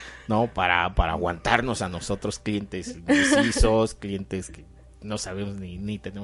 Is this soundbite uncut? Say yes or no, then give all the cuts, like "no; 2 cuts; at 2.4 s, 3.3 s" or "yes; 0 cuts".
yes; 0 cuts